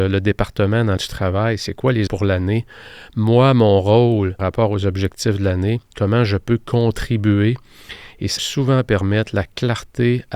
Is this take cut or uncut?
cut